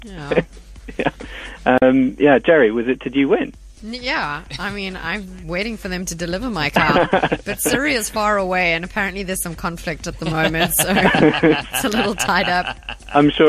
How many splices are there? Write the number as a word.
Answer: zero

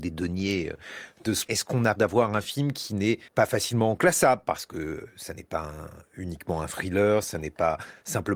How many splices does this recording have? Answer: three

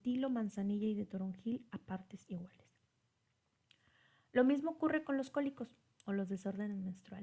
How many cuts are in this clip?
zero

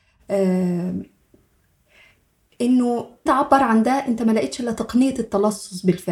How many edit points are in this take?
one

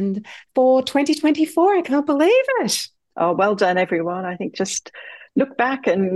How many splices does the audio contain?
zero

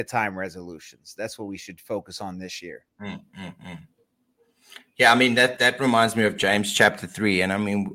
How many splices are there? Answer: two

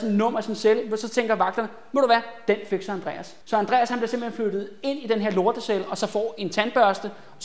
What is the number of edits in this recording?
one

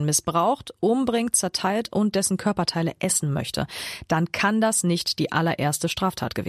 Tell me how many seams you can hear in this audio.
zero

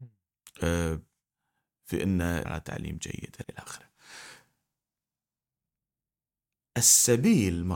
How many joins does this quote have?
two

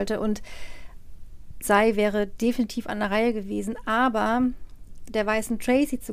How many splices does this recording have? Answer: one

